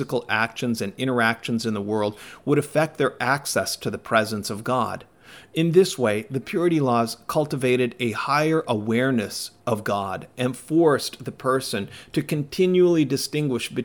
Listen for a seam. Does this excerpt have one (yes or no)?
yes